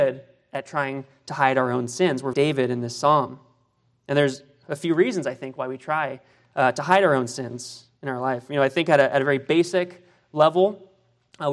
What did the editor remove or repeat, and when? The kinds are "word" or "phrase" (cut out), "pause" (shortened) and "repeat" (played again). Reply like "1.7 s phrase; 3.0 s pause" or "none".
2.3 s phrase